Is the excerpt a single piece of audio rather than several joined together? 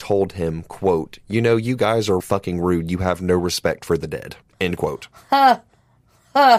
no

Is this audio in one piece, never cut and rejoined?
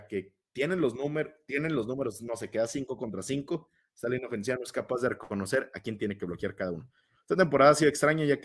yes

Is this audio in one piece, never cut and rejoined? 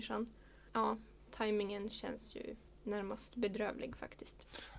yes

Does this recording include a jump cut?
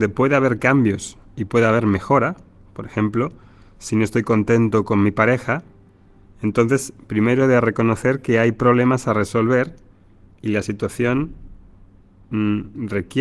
no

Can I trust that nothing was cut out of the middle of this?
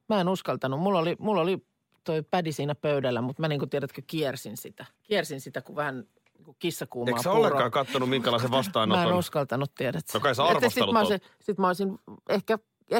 no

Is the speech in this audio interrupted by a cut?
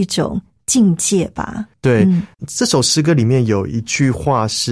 yes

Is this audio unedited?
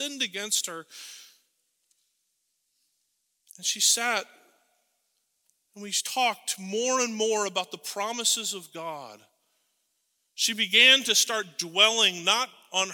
yes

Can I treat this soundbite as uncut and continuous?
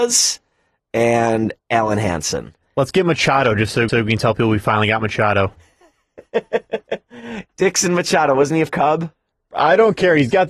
no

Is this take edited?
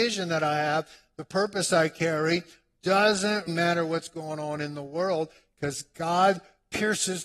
yes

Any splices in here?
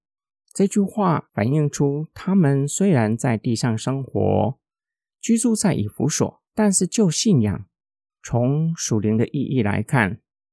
yes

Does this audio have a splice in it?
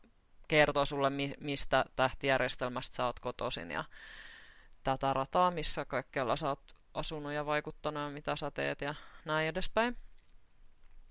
no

